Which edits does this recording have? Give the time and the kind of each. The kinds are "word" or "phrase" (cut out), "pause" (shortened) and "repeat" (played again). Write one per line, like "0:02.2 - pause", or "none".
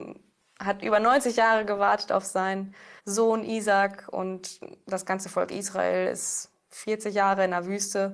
0:03.0 - pause